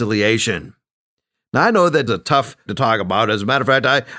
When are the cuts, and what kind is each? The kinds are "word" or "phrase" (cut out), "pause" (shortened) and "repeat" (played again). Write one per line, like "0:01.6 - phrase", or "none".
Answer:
0:02.1 - phrase
0:02.7 - word